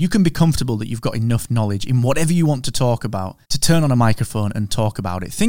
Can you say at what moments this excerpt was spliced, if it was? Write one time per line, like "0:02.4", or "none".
0:03.4